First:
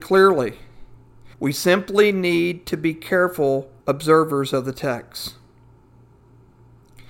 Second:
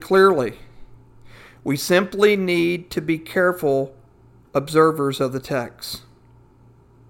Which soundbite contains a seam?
first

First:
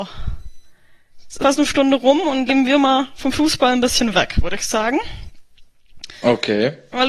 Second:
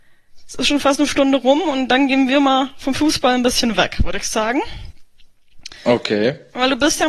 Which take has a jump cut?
first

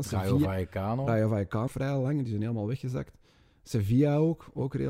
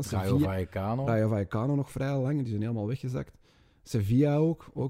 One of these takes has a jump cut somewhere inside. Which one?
first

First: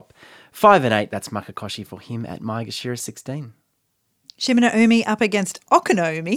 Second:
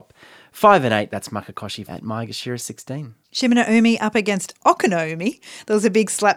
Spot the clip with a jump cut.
second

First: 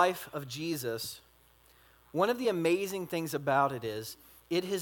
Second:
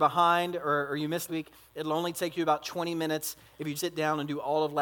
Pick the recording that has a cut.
second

